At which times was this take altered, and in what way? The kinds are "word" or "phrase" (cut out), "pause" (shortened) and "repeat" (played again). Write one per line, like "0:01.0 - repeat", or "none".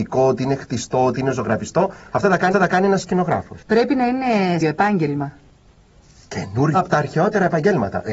0:02.5 - repeat
0:03.6 - pause
0:04.6 - phrase
0:06.7 - phrase

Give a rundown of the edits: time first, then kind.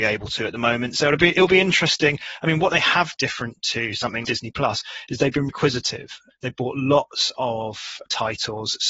0:03.1 - phrase
0:04.2 - word
0:05.5 - word

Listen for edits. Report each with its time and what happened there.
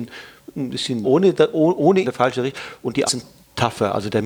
0:01.0 - word
0:02.0 - phrase
0:03.1 - word

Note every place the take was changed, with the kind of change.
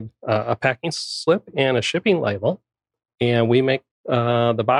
none

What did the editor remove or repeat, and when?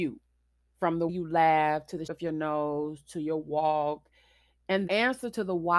0:01.1 - word
0:02.1 - word
0:04.9 - word

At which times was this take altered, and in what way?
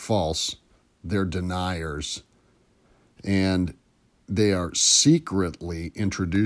none

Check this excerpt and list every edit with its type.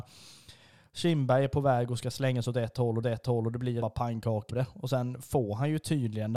0:03.0 - repeat
0:03.8 - word
0:04.5 - word

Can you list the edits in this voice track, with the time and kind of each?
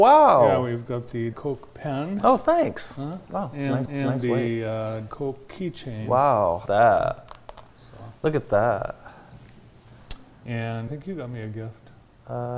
0:01.3 - word
0:03.2 - pause
0:03.9 - repeat
0:05.1 - word
0:06.7 - word
0:10.9 - word

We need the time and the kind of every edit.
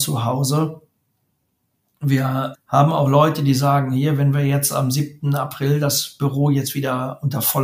0:02.5 - word

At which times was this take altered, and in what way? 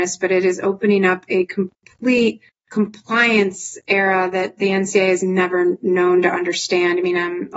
0:02.5 - pause

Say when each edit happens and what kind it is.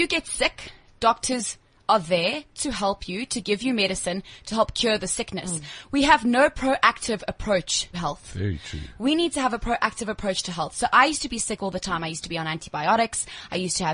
0:07.9 - word

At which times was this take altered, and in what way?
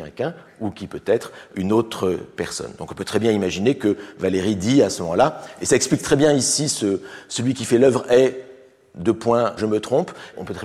0:09.6 - word

